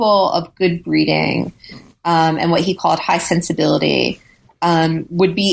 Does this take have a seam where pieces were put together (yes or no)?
no